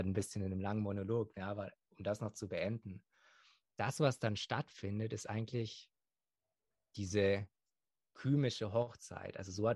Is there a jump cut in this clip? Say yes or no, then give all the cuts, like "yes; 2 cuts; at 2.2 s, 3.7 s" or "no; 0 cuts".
no; 0 cuts